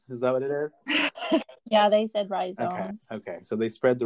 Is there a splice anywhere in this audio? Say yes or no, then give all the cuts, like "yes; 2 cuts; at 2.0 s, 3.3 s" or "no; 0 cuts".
no; 0 cuts